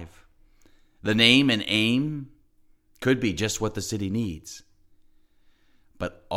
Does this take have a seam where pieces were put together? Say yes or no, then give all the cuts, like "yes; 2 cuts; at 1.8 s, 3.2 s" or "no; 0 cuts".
no; 0 cuts